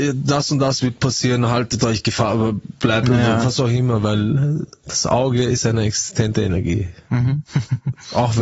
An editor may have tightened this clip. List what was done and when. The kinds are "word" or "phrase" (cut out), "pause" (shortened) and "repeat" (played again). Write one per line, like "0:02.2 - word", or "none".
0:07.5 - pause